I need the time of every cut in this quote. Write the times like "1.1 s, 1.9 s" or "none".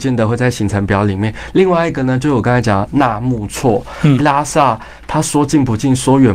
4.2 s